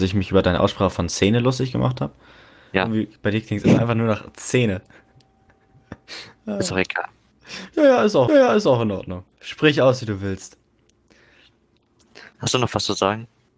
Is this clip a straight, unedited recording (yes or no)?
no